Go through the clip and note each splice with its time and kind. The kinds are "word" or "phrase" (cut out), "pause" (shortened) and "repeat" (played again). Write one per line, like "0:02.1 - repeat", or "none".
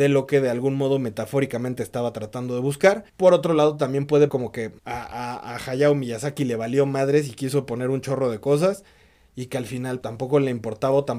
0:03.1 - pause
0:04.3 - word
0:04.8 - pause
0:10.0 - word